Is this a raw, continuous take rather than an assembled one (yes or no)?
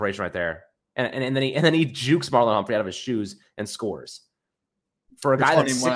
yes